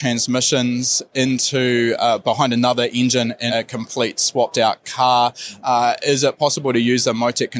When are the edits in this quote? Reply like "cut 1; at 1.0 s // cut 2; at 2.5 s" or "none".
cut 1; at 3.5 s